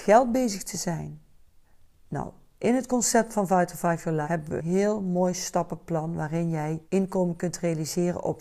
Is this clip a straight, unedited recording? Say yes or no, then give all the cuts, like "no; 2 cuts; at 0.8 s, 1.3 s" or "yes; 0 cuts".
no; 4 cuts; at 1.6 s, 4.2 s, 4.6 s, 6.8 s